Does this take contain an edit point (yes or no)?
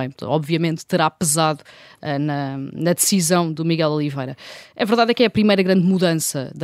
no